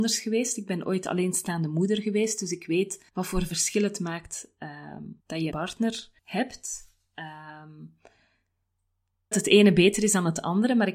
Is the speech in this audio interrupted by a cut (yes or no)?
yes